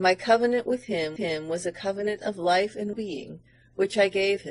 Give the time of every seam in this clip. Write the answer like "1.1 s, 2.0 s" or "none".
1.2 s, 2.9 s